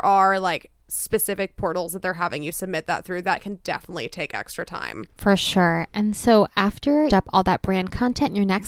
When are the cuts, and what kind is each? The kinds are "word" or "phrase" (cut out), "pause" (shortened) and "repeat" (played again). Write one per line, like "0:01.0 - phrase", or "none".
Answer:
0:05.1 - pause
0:07.1 - phrase